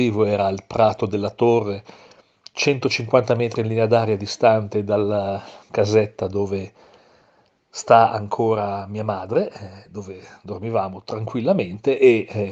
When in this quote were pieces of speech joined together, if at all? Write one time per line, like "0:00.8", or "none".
none